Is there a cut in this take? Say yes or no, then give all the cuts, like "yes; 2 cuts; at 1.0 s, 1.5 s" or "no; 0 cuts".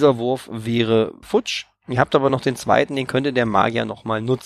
no; 0 cuts